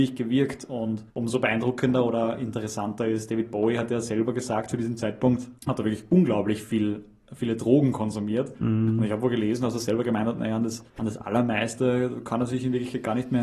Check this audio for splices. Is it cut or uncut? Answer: cut